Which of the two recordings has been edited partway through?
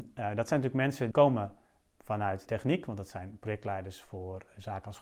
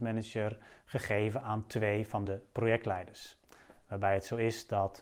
first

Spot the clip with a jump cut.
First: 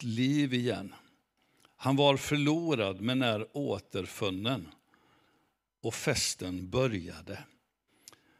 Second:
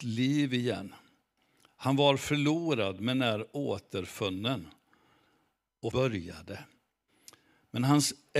second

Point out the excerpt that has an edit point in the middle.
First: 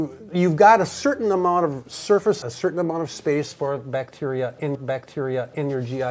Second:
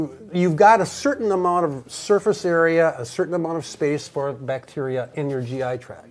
first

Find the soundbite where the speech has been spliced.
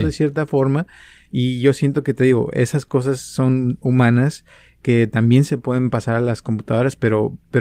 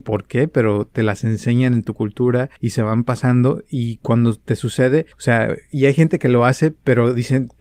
second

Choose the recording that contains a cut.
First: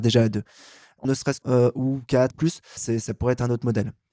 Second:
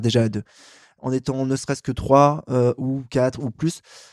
first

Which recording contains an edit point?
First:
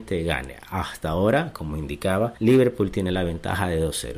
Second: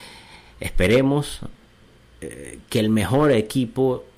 first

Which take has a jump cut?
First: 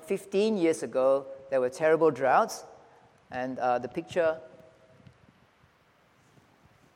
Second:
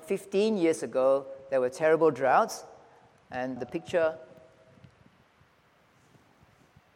second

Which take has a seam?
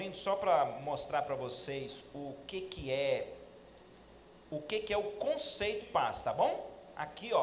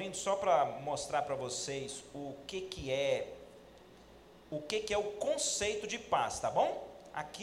first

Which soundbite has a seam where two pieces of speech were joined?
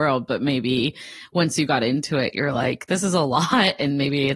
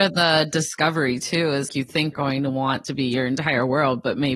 second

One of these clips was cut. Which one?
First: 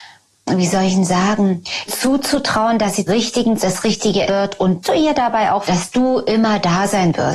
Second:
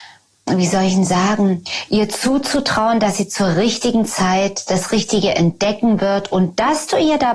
first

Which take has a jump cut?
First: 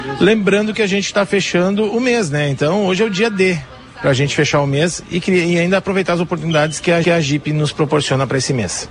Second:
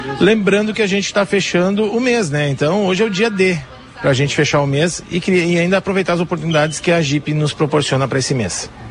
first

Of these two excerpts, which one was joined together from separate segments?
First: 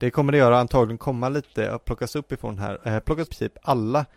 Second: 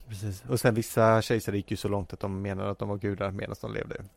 first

